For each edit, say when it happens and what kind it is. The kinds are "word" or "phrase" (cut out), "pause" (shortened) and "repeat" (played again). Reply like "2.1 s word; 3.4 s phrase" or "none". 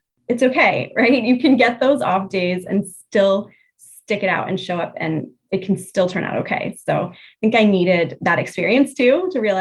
none